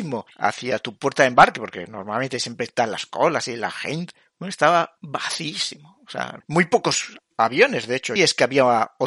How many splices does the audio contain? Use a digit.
2